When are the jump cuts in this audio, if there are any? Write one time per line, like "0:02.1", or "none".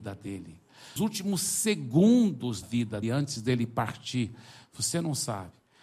0:01.0
0:02.6
0:03.0